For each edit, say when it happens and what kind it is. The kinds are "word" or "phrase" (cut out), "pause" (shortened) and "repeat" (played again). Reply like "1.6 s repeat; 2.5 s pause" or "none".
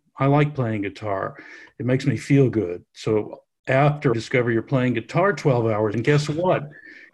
4.1 s phrase; 5.9 s phrase